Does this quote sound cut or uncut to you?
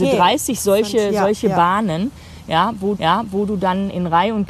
cut